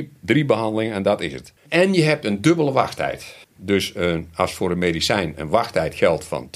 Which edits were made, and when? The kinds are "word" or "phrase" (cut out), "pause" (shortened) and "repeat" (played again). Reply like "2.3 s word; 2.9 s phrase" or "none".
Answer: 1.6 s pause; 3.4 s pause